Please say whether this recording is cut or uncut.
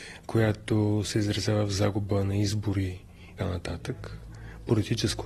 cut